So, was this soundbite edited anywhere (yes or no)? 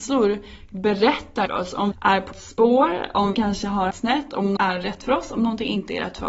yes